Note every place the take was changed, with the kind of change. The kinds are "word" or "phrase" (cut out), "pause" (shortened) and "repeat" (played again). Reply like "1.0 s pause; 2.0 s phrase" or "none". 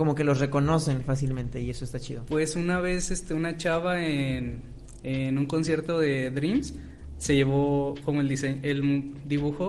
none